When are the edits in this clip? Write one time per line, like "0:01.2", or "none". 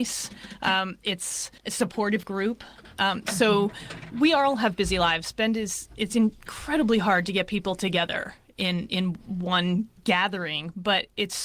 0:01.6